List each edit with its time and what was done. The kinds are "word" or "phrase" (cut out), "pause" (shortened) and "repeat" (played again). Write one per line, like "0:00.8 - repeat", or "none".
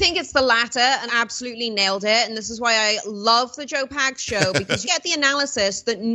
0:01.1 - phrase
0:04.8 - phrase